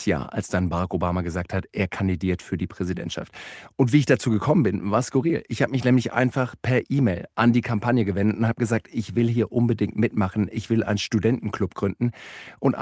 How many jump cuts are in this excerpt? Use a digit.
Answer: 0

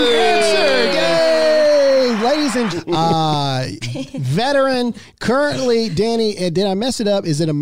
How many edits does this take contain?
2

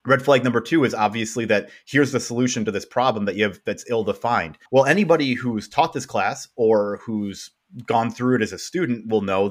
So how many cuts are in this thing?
1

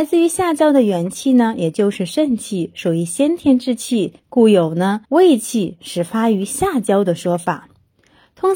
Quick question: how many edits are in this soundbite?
2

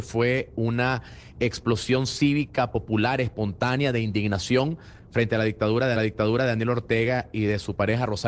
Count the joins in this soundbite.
1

